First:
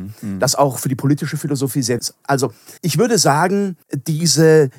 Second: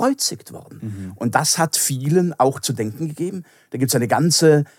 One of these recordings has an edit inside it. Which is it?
first; 3 cuts; at 2.0 s, 2.8 s, 3.8 s

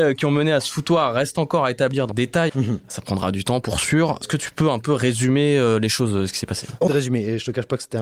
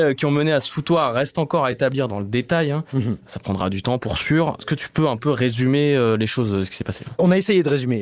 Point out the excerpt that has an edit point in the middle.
first; 3 cuts; at 2.1 s, 2.5 s, 6.9 s

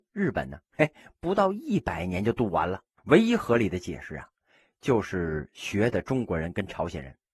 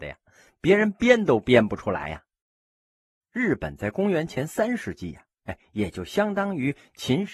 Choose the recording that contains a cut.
first; 1 cut; at 3.0 s

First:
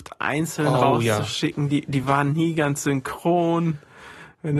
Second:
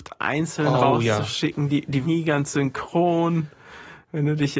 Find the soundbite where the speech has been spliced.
second; 1 cut; at 2.0 s

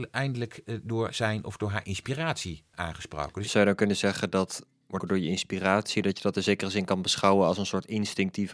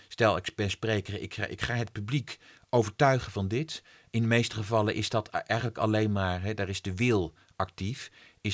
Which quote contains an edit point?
first; 2 cuts; at 2.7 s, 5.0 s

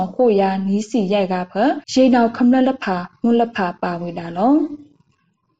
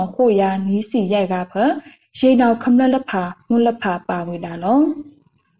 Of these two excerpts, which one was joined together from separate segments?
first; 1 cut; at 1.8 s

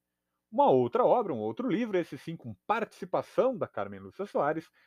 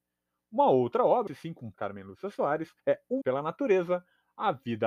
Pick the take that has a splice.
second; 4 cuts; at 1.3 s, 1.7 s, 2.8 s, 3.2 s

